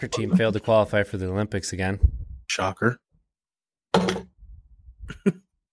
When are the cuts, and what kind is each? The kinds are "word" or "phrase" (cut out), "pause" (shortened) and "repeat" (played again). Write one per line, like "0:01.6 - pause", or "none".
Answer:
0:02.4 - pause